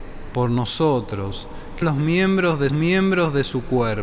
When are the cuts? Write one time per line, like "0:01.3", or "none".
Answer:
0:01.8
0:02.7